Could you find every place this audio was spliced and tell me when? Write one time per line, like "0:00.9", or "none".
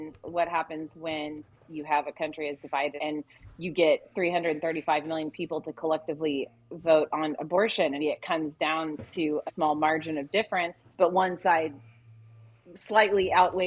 0:03.0
0:08.0
0:09.5
0:10.9